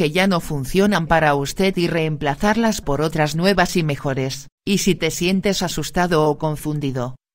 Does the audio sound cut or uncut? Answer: cut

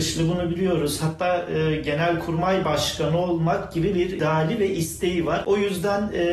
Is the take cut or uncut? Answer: uncut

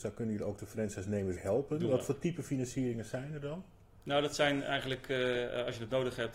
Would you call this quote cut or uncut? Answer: cut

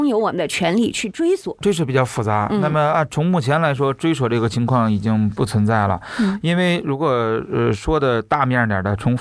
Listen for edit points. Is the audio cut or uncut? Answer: uncut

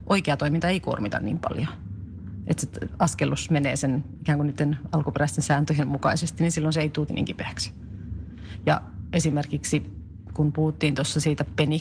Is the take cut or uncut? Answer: cut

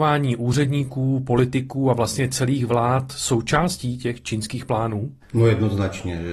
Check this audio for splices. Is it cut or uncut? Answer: uncut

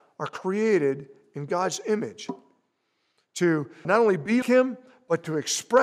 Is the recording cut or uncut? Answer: cut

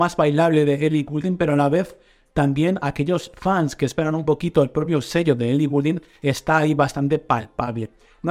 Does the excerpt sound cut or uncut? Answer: uncut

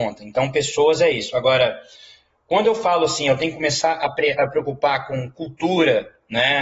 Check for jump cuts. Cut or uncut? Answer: uncut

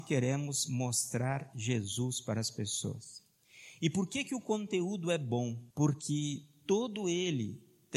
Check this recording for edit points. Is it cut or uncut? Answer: cut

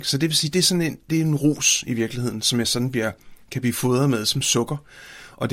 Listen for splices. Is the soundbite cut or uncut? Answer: uncut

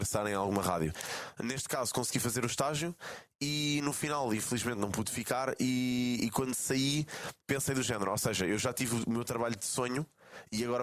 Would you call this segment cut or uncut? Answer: uncut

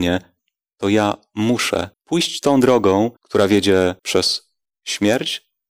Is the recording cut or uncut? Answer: cut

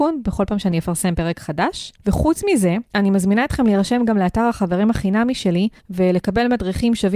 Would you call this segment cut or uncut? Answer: cut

